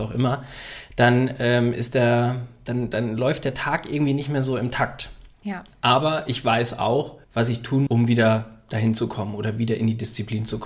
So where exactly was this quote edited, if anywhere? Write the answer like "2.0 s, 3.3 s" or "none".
5.3 s, 7.2 s, 7.9 s